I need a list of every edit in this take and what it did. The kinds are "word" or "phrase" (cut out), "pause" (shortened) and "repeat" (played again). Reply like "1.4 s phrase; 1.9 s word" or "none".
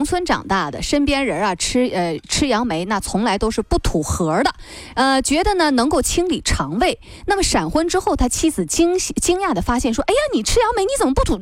none